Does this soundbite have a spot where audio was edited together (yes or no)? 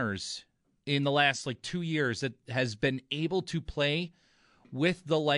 no